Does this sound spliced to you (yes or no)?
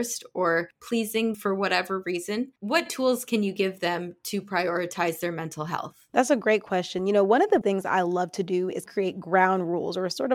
yes